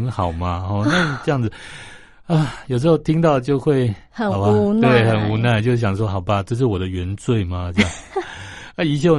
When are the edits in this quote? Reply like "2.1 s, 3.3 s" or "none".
none